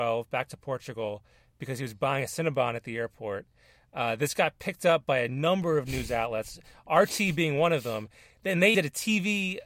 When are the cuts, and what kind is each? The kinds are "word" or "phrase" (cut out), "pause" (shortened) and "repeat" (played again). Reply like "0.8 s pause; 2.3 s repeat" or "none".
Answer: 8.7 s word